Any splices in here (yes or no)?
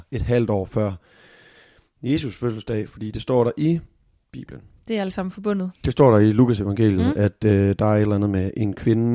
no